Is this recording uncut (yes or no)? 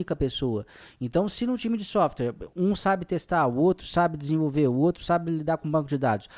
yes